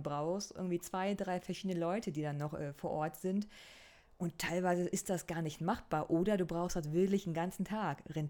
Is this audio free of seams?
yes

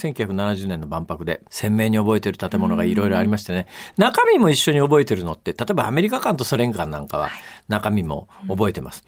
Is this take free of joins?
no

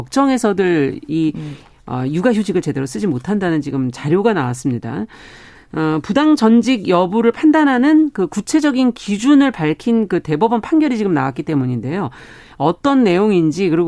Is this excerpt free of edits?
yes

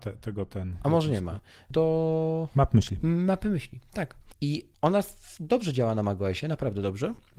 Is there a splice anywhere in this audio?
no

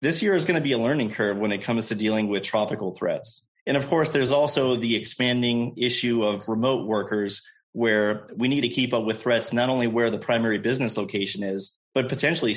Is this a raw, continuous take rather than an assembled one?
yes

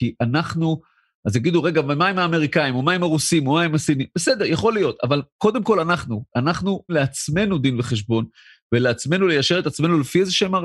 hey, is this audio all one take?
no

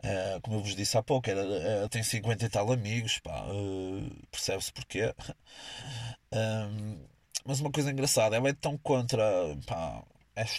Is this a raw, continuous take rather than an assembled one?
no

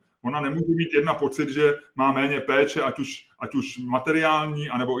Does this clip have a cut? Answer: no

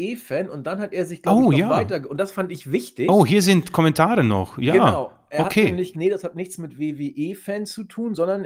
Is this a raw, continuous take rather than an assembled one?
no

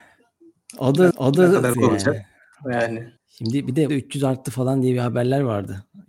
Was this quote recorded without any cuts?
no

